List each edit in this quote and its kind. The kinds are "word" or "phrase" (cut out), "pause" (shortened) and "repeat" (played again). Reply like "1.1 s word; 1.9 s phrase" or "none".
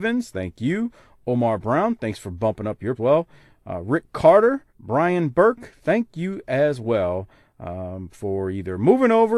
3.0 s phrase; 4.7 s pause